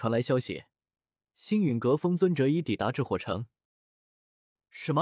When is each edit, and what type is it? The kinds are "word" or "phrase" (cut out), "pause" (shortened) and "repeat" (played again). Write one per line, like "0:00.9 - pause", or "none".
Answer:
none